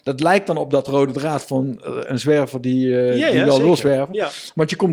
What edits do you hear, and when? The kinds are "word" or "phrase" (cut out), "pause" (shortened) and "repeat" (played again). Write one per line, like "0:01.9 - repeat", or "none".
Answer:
none